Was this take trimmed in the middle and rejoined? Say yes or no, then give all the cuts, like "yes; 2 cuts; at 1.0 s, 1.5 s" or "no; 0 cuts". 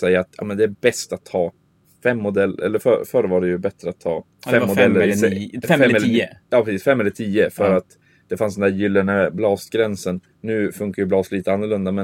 yes; 3 cuts; at 4.3 s, 6.4 s, 10.3 s